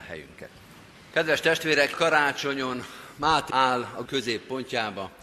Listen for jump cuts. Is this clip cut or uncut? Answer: cut